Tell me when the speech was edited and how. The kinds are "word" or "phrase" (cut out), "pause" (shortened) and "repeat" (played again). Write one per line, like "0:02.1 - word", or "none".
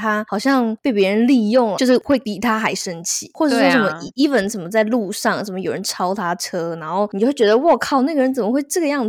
0:01.7 - word